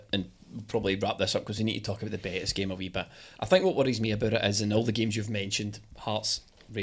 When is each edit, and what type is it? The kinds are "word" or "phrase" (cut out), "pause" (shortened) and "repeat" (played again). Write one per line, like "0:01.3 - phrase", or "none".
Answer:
none